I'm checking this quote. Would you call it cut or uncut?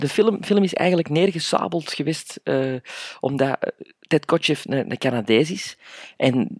uncut